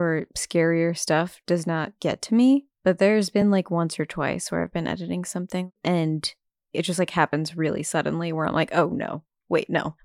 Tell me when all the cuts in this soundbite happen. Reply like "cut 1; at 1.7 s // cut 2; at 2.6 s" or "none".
none